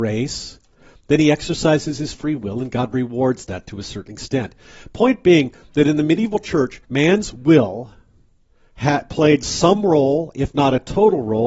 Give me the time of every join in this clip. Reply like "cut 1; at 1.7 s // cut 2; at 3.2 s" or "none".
cut 1; at 6.8 s